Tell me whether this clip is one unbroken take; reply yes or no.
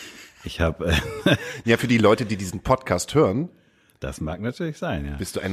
yes